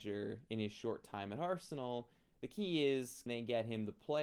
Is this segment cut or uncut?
cut